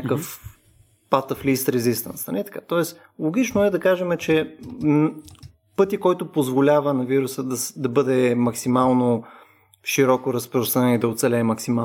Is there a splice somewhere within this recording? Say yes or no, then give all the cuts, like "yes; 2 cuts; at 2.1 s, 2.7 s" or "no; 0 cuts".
no; 0 cuts